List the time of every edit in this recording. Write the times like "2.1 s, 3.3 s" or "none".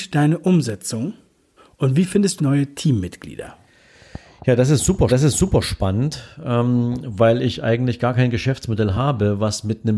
1.6 s, 2.4 s, 5.1 s